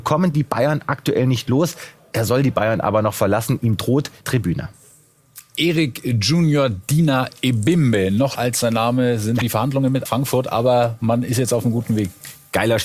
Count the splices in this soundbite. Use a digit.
4